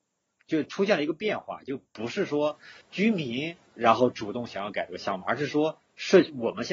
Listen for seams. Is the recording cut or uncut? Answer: cut